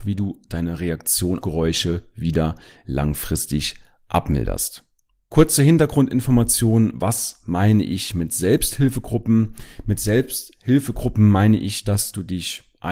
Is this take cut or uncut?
cut